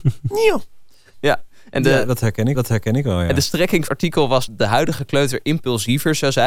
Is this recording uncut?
no; 4 cuts; at 1.1 s, 2.5 s, 3.9 s, 4.5 s

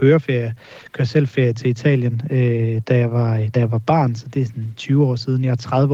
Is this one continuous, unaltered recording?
yes; 0 cuts

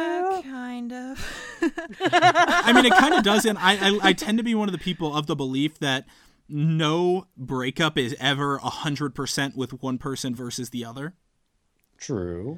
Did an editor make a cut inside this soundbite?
no; 0 cuts

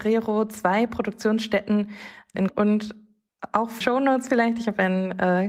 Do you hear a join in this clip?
yes; 2 cuts; at 2.5 s, 3.8 s

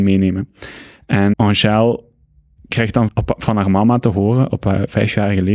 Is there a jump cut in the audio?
yes; 2 cuts; at 1.3 s, 3.1 s

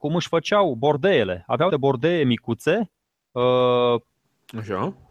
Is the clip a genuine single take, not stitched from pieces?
no; 1 cut; at 1.7 s

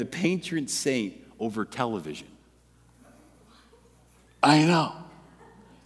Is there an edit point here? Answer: no; 0 cuts

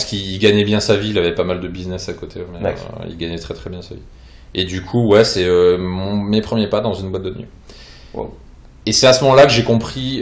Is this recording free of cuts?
yes; 0 cuts

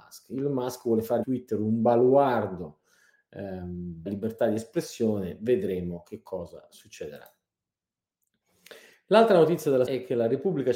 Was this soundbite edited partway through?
yes; 3 cuts; at 1.2 s, 4.1 s, 9.9 s

